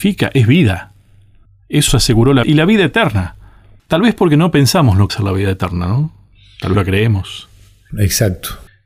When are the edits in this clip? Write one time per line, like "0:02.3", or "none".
0:01.9
0:02.4
0:05.1
0:06.7